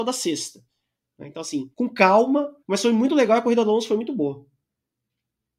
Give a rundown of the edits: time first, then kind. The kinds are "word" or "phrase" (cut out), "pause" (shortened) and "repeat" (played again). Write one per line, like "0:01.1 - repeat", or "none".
0:01.7 - pause
0:02.6 - pause